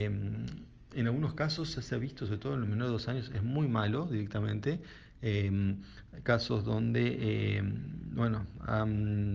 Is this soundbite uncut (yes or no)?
yes